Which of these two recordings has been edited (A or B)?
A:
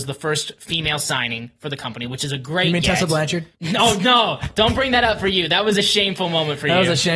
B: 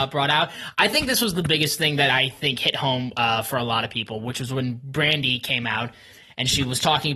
A